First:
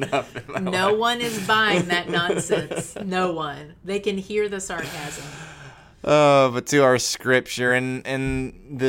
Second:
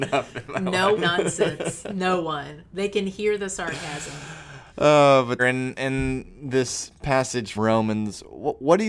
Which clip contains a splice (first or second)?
second